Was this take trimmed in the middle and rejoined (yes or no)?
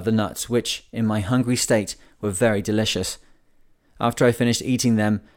no